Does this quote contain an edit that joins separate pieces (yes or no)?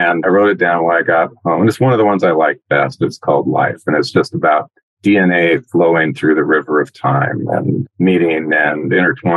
no